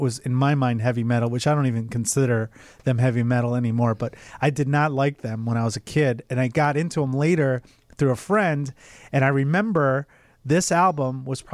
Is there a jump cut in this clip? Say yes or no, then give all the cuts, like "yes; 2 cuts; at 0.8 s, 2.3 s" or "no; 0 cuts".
no; 0 cuts